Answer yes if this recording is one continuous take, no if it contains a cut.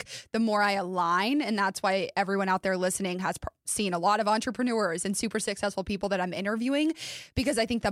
yes